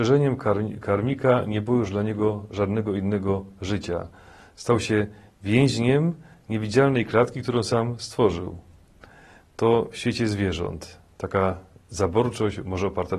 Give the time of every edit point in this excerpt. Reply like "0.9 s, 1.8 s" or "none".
none